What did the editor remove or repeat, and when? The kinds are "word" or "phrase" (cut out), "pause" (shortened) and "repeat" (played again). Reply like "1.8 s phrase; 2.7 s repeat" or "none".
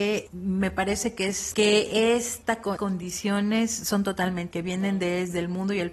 1.5 s word; 2.8 s word; 4.5 s word